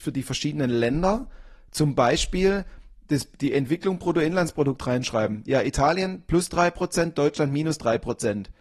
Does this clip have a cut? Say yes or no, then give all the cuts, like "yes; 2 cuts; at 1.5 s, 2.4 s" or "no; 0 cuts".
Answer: no; 0 cuts